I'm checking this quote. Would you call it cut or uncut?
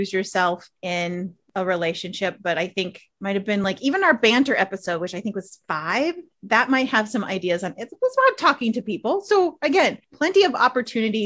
uncut